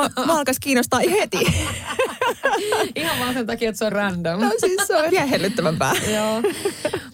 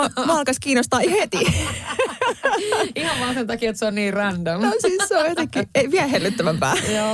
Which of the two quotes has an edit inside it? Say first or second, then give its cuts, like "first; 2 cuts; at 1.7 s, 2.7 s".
first; 2 cuts; at 3.9 s, 5.1 s